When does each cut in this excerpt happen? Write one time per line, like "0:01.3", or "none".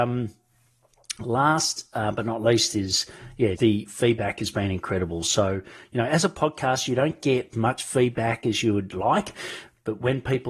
0:03.6
0:07.5